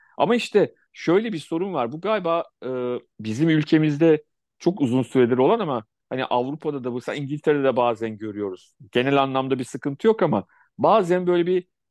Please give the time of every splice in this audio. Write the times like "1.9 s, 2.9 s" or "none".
3.1 s